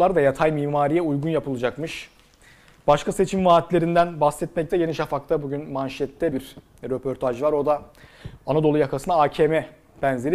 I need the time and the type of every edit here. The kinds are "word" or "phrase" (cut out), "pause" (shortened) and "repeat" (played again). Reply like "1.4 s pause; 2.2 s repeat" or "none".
4.7 s word; 6.3 s phrase